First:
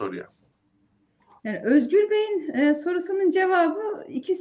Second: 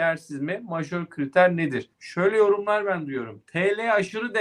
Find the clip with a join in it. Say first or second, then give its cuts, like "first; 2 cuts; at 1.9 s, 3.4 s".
second; 1 cut; at 1.9 s